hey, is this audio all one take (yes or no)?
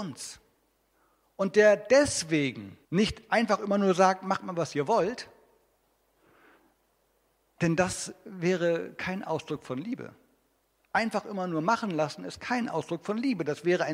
no